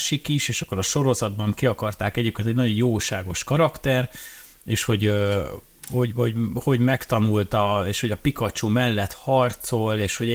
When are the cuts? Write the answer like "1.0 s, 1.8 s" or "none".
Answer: none